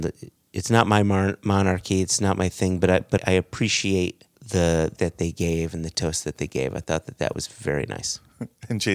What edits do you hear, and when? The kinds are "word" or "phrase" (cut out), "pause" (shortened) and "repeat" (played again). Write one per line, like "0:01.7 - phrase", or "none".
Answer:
0:03.2 - word
0:04.3 - pause
0:05.0 - word
0:07.3 - phrase